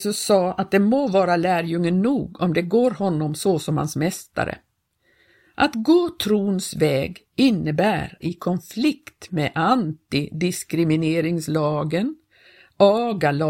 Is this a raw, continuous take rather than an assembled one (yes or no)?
no